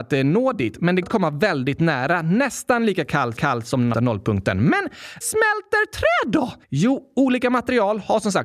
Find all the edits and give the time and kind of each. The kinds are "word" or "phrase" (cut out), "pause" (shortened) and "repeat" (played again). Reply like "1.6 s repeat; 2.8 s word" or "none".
1.0 s word; 3.4 s repeat; 3.9 s word; 5.2 s word; 6.6 s pause